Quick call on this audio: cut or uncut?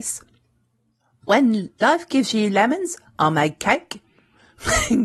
uncut